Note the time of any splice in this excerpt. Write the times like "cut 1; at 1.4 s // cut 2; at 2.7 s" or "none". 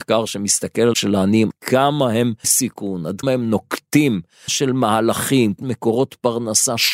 cut 1; at 0.9 s // cut 2; at 1.5 s // cut 3; at 2.4 s // cut 4; at 3.2 s // cut 5; at 4.5 s // cut 6; at 5.6 s